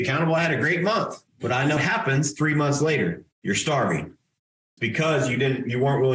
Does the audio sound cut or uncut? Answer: cut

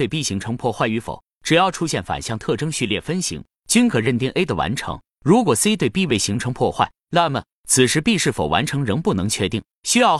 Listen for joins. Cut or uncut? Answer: uncut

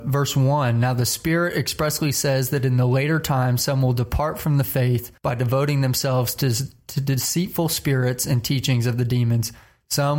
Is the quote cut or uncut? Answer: cut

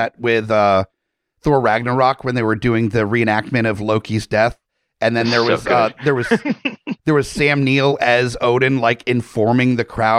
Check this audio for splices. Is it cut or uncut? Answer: uncut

